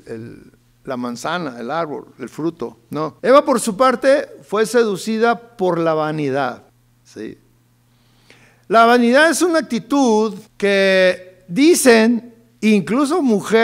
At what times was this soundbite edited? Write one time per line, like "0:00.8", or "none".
0:03.2
0:06.7
0:10.5